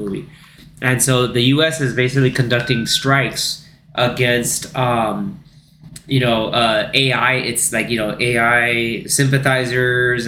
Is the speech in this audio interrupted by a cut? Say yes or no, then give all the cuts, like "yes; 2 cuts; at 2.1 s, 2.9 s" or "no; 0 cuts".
no; 0 cuts